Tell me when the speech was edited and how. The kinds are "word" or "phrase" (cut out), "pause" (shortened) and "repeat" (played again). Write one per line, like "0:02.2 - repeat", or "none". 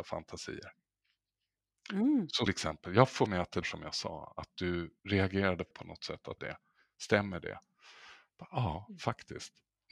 0:02.5 - word
0:03.3 - word
0:03.6 - word
0:05.0 - pause
0:05.7 - word
0:06.4 - phrase

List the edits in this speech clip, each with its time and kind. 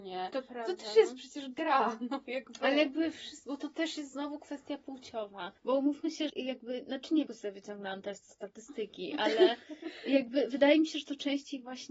0:05.6 - pause
0:06.3 - word
0:07.3 - phrase

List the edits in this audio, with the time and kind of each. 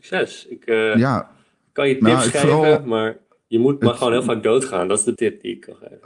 0:05.2 - word

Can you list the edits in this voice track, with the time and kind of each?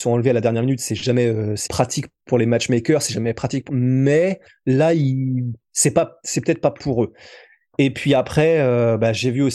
0:01.7 - word
0:03.7 - word
0:04.5 - pause
0:06.8 - word

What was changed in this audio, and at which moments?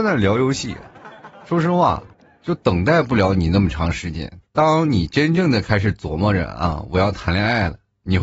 0:02.1 - pause
0:04.5 - pause

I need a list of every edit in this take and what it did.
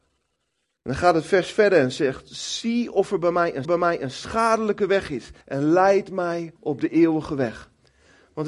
0:03.6 - repeat
0:05.4 - pause
0:06.6 - pause

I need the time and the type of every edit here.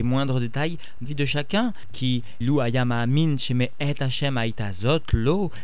0:01.1 - word
0:02.4 - word

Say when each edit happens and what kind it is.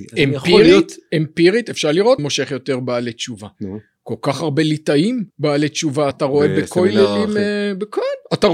0:02.2 - word
0:05.3 - pause
0:06.1 - word

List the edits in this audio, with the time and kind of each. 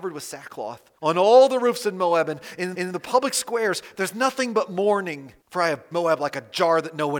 0:01.0 - pause
0:02.7 - repeat
0:05.4 - pause
0:05.9 - word

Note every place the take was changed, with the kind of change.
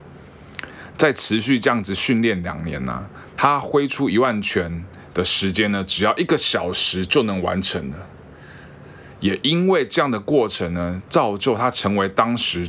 none

